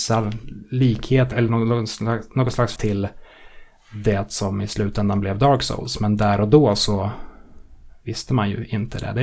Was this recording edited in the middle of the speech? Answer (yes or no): yes